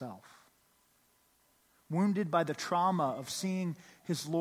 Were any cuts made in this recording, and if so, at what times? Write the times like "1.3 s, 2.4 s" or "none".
none